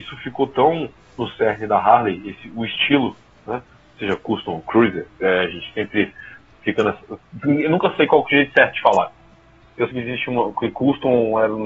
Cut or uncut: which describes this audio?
cut